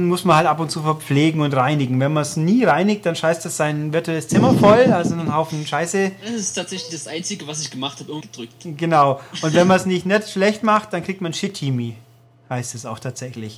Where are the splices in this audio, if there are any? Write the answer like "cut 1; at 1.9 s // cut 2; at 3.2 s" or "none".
cut 1; at 8.2 s